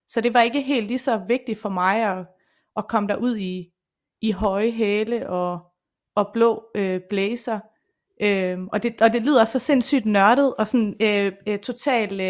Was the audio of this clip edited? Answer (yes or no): no